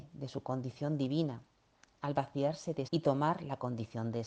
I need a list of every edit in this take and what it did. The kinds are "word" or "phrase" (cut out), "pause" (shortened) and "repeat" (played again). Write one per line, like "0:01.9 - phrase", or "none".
0:02.9 - word